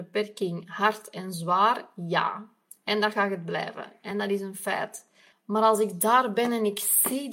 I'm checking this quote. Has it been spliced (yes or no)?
no